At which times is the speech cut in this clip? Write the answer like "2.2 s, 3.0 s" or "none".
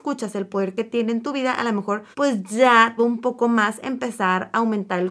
2.1 s, 3.0 s